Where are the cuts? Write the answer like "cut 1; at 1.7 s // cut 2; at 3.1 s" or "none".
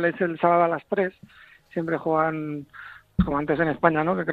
none